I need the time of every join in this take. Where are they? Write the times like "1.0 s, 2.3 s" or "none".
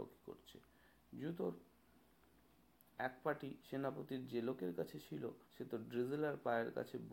3.6 s, 5.4 s